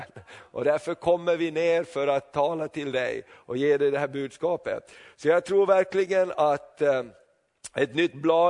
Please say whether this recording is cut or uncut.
uncut